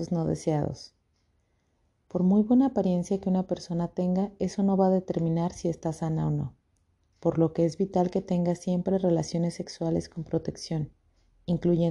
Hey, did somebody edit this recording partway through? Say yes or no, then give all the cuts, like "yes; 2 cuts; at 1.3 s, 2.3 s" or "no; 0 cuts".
no; 0 cuts